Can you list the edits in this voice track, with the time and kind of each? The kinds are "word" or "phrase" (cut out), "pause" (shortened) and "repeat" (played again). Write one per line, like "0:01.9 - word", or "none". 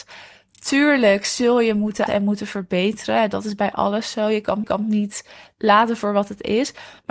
0:02.1 - word
0:04.6 - repeat

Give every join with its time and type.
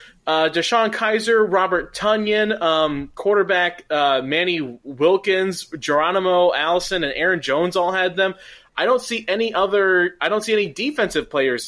none

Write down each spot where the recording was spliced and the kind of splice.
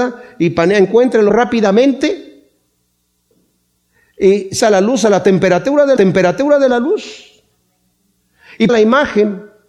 0:01.3 - word
0:04.6 - word
0:06.0 - repeat
0:08.7 - word

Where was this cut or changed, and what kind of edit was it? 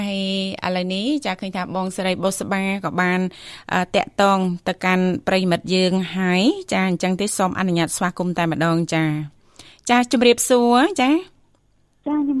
none

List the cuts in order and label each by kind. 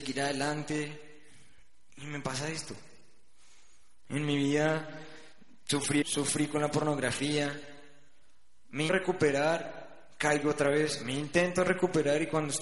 0:06.0 - word
0:08.9 - word

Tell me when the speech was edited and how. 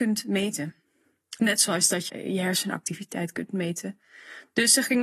0:02.1 - word

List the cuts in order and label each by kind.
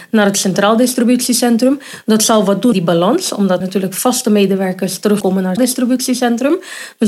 0:02.7 - word
0:03.6 - word
0:05.2 - word
0:05.6 - word

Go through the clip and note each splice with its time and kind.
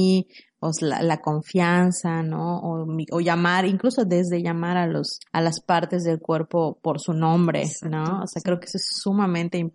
0:05.3 - pause

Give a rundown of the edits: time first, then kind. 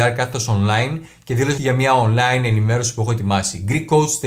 0:01.6 - word

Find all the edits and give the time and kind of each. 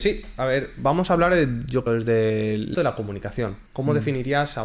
0:01.9 - phrase
0:02.7 - word
0:03.7 - pause

